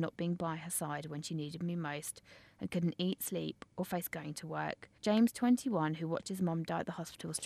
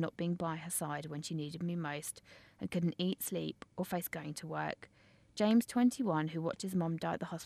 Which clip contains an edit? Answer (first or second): first